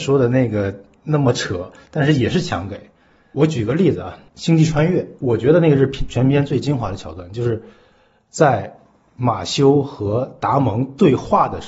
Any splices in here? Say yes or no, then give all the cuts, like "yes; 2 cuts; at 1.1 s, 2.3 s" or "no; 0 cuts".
yes; 1 cut; at 5.2 s